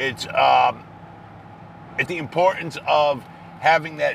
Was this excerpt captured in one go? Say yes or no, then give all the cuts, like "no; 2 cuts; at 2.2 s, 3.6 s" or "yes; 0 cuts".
no; 1 cut; at 2.1 s